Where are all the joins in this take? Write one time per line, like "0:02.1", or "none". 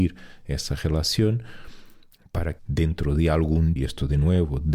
0:02.6
0:03.8